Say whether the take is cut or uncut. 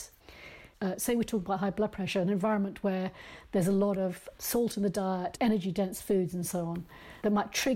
uncut